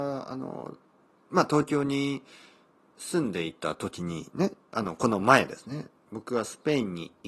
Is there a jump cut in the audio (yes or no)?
no